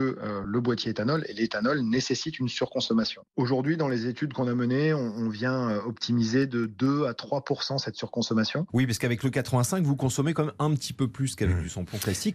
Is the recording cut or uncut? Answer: uncut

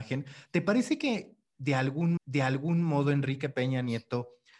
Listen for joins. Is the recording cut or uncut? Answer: cut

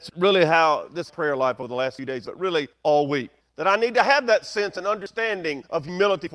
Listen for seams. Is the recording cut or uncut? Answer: cut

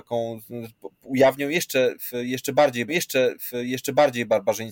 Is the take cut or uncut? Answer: cut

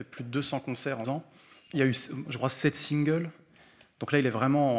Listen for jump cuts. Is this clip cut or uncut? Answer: cut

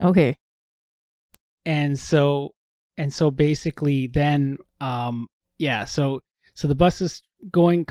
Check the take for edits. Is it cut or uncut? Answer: uncut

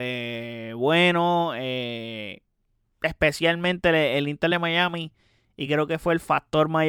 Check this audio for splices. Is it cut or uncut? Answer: uncut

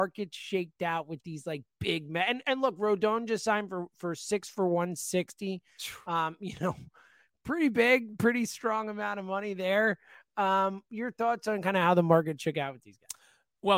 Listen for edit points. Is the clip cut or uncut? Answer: uncut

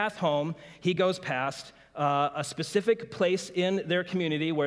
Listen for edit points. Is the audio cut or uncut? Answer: uncut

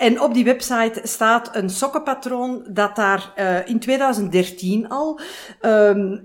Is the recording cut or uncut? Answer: uncut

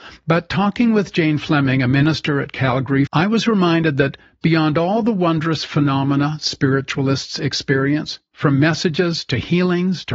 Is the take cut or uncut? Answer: cut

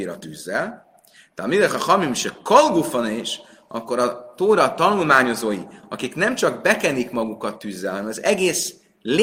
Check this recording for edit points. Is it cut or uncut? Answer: uncut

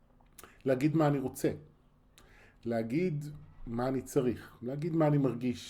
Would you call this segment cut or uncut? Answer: uncut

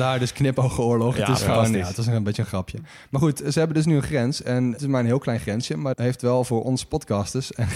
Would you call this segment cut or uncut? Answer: cut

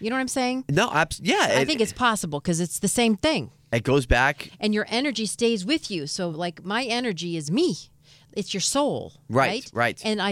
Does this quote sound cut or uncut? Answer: uncut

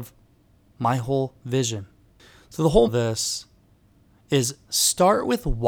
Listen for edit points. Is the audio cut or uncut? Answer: cut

